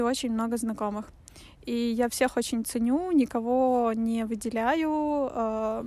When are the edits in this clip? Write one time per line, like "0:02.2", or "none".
none